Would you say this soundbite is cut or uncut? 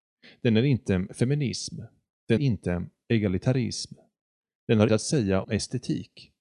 cut